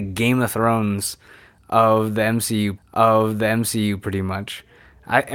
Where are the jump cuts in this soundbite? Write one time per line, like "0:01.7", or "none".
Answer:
0:02.8